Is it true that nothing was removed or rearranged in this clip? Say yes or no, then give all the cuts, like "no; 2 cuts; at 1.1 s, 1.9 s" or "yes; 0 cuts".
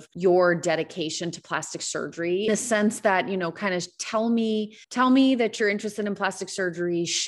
no; 2 cuts; at 2.5 s, 4.8 s